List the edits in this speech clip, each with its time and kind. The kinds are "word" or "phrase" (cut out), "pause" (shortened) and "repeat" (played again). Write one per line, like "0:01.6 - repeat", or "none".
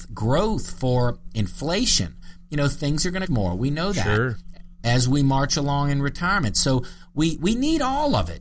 0:03.2 - phrase